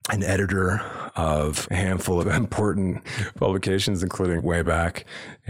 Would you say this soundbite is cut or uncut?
cut